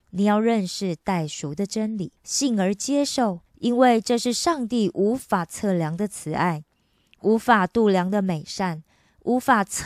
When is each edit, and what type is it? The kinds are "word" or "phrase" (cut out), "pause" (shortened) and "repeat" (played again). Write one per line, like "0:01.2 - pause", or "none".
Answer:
0:02.2 - pause
0:03.5 - pause